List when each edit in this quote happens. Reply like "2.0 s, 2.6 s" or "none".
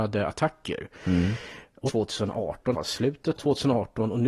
1.9 s, 2.7 s, 3.4 s